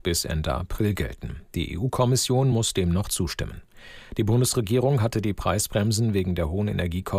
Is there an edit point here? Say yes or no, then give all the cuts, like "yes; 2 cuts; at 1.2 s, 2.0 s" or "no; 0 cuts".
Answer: no; 0 cuts